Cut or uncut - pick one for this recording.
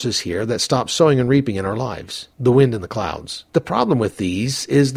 cut